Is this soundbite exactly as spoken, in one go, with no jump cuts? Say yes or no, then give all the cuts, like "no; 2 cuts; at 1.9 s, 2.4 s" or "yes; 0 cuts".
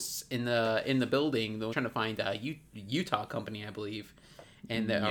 no; 1 cut; at 1.7 s